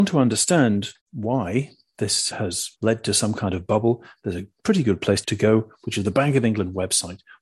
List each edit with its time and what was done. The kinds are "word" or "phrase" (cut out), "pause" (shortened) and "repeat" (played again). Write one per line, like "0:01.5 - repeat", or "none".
0:01.0 - pause
0:02.3 - word
0:02.8 - pause